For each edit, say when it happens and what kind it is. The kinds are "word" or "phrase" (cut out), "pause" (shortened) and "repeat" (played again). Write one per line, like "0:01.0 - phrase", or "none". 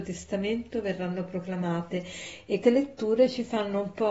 0:02.6 - word